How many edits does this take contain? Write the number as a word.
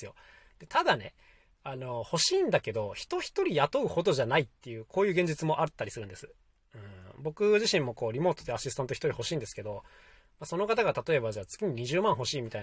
zero